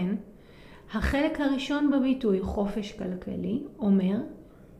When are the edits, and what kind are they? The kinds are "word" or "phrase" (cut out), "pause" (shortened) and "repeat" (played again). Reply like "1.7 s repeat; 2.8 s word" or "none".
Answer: none